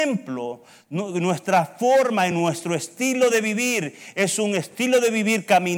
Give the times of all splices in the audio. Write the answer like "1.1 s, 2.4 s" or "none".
none